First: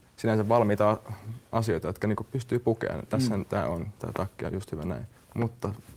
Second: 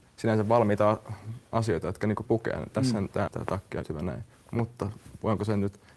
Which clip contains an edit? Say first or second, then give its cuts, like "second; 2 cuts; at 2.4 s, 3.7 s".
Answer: second; 3 cuts; at 2.2 s, 3.3 s, 3.8 s